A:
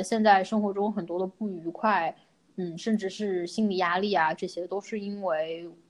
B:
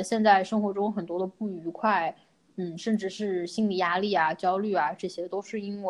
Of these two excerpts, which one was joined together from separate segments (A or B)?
A